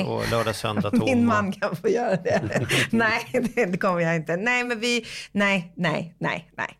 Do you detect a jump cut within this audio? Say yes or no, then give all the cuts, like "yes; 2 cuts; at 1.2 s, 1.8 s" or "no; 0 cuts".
no; 0 cuts